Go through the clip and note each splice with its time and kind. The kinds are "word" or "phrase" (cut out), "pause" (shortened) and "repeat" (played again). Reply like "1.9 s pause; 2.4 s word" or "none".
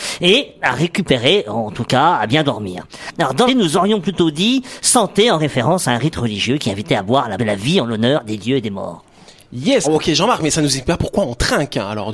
3.5 s word; 7.4 s word; 9.8 s word